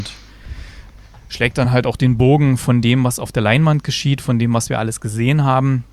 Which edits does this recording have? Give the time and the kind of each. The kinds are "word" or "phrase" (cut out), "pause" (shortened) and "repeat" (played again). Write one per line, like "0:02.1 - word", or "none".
none